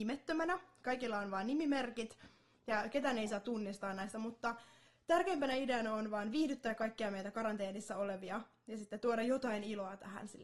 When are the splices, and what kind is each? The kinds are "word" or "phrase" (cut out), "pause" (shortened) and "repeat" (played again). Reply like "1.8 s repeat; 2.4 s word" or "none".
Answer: 4.1 s word